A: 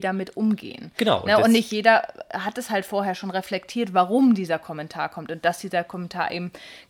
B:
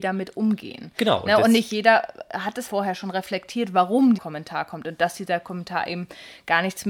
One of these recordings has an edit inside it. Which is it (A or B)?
B